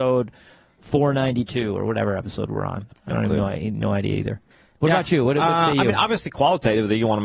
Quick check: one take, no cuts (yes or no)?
no